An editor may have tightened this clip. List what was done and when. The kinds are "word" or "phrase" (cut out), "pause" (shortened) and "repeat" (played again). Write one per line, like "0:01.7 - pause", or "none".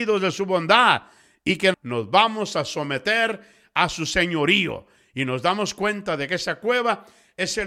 0:01.7 - word